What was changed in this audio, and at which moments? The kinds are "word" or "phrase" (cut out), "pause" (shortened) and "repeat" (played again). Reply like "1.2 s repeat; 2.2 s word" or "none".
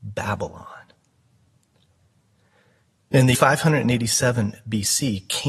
3.3 s word